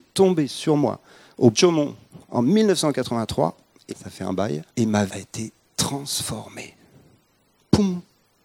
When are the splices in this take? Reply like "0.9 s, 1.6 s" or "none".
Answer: 1.5 s, 3.9 s, 4.7 s, 5.1 s